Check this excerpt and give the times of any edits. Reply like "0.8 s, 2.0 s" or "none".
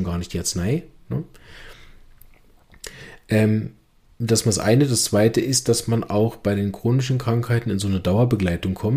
none